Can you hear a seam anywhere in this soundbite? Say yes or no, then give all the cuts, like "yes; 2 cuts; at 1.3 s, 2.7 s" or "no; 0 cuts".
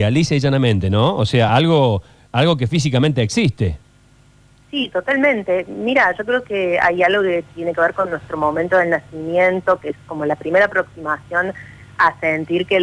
no; 0 cuts